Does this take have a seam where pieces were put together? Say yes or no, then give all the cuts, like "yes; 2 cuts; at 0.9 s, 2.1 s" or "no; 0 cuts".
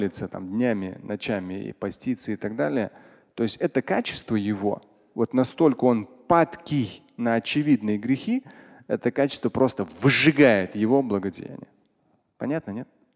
no; 0 cuts